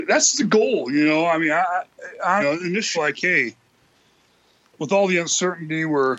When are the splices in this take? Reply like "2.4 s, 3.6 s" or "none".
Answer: 2.4 s, 2.9 s